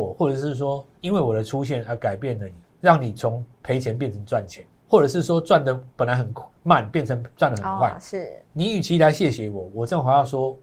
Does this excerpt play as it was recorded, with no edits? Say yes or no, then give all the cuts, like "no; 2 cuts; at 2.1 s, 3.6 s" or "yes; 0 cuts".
no; 4 cuts; at 0.9 s, 2.6 s, 5.9 s, 8.4 s